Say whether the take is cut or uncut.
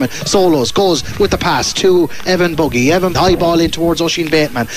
cut